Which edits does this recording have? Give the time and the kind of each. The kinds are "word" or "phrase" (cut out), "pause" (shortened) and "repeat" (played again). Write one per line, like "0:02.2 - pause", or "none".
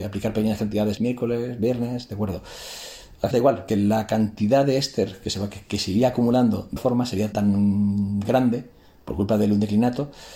0:01.0 - word
0:03.3 - word
0:03.7 - word
0:06.8 - word
0:07.3 - word

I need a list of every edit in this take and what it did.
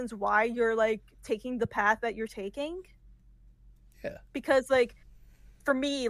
none

